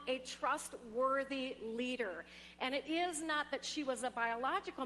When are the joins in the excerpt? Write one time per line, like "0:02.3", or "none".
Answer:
none